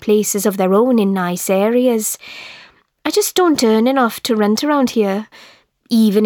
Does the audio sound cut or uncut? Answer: uncut